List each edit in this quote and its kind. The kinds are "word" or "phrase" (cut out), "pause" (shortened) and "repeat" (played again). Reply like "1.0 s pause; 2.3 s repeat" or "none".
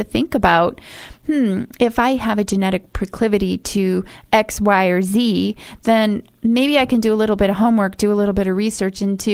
none